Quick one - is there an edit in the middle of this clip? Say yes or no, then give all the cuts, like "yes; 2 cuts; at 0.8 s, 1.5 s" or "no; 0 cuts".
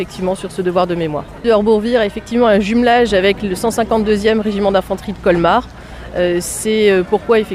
no; 0 cuts